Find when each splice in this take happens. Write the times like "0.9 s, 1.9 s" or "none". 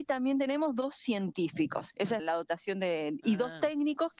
2.2 s